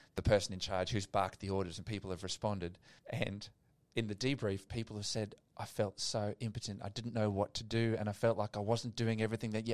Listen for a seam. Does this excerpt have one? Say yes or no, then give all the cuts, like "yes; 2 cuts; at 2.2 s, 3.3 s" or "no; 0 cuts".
yes; 1 cut; at 3.0 s